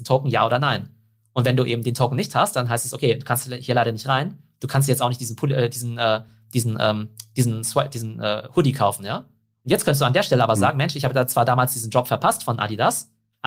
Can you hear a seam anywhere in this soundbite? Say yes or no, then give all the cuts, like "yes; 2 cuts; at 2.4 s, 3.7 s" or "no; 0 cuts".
no; 0 cuts